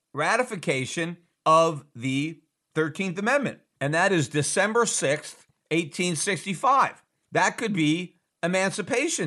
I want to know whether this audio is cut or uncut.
uncut